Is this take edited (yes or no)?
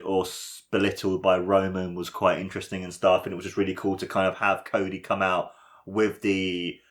no